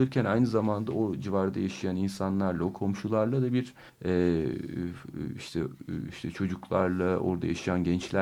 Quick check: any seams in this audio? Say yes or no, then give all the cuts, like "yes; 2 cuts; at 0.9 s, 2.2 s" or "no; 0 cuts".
yes; 1 cut; at 3.9 s